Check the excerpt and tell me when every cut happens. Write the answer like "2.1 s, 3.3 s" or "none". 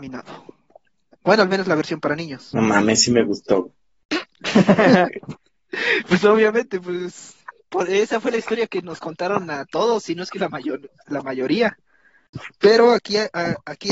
none